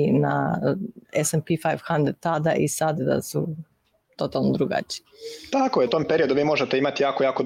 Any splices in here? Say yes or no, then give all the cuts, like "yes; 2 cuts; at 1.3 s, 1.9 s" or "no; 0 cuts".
yes; 2 cuts; at 3.0 s, 5.9 s